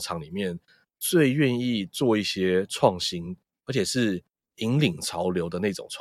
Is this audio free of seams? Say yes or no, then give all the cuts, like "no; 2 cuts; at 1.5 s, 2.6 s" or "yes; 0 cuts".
yes; 0 cuts